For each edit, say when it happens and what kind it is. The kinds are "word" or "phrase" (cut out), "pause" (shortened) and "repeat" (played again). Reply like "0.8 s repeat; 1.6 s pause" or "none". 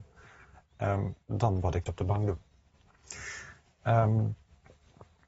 1.2 s pause; 1.9 s word